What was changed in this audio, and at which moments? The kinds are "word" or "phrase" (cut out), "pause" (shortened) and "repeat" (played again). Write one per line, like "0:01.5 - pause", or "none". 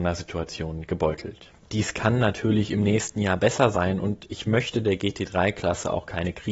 0:01.6 - pause